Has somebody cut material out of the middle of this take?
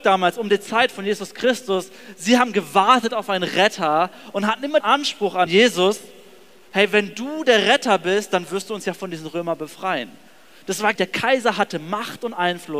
yes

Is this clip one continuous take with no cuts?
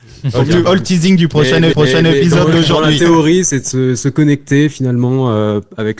no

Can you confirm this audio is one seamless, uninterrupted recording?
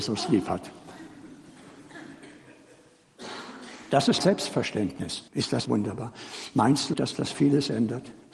no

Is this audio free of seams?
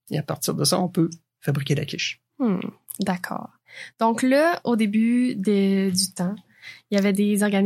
yes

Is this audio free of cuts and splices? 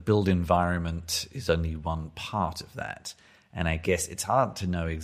yes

